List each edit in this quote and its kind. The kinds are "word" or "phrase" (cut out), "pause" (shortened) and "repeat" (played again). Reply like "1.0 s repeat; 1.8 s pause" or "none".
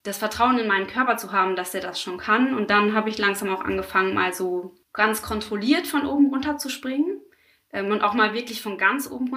4.8 s pause